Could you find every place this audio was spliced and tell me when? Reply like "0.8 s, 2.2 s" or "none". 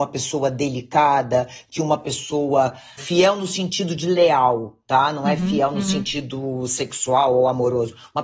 3.0 s